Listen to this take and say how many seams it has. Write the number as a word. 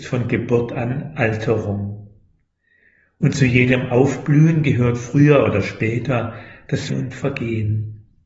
one